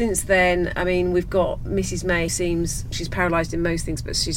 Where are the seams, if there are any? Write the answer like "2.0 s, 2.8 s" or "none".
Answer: 2.3 s, 2.9 s